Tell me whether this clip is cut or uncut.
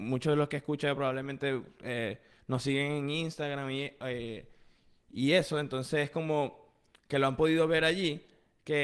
uncut